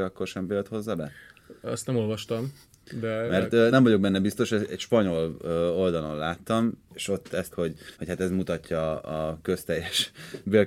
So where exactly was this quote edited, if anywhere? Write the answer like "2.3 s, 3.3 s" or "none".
3.7 s, 6.9 s, 7.5 s, 7.9 s

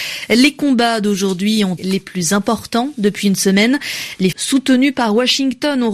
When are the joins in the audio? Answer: 1.8 s, 4.3 s

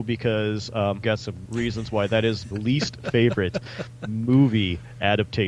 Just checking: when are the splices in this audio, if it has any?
1.0 s, 1.5 s, 2.5 s

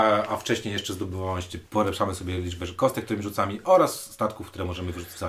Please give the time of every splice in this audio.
1.7 s

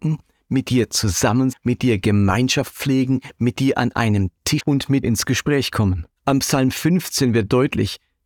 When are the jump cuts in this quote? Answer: 1.5 s, 4.6 s, 5.0 s, 6.2 s

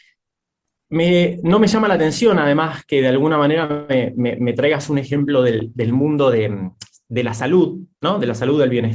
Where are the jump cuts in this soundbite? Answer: none

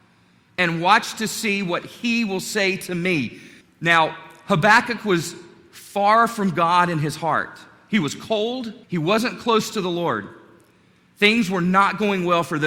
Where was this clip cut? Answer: 3.6 s, 8.8 s

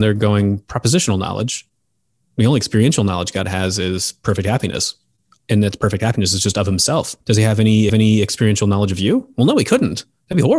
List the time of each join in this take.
7.2 s, 7.9 s

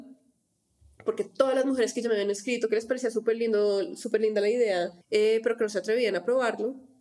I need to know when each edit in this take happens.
5.0 s

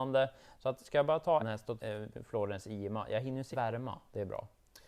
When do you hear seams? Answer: 1.4 s, 1.8 s, 3.5 s

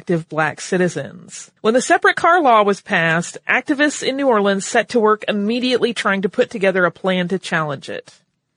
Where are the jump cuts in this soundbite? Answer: 1.6 s

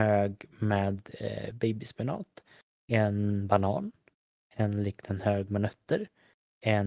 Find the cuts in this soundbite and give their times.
none

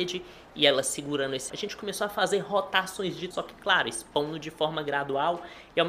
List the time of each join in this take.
1.5 s, 3.3 s

